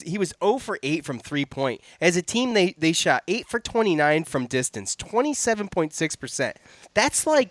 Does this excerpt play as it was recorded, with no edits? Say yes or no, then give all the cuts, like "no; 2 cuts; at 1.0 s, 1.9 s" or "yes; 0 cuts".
yes; 0 cuts